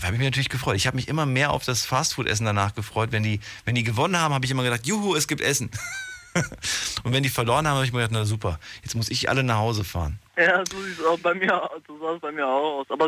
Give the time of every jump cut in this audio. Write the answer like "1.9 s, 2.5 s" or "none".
10.3 s